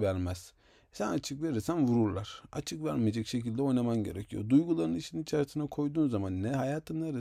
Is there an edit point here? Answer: no; 0 cuts

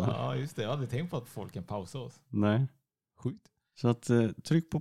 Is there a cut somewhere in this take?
no; 0 cuts

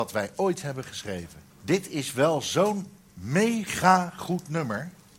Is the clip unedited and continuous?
no; 1 cut; at 1.5 s

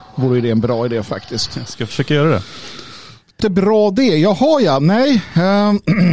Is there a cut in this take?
yes; 1 cut; at 3.4 s

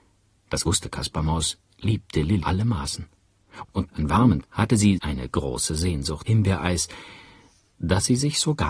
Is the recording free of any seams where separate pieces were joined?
no; 5 cuts; at 2.4 s, 3.9 s, 4.4 s, 5.0 s, 6.3 s

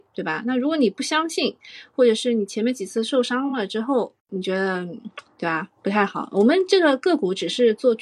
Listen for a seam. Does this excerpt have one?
yes; 1 cut; at 4.2 s

